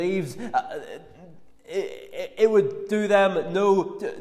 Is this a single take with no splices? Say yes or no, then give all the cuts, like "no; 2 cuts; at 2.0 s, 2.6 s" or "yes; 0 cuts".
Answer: yes; 0 cuts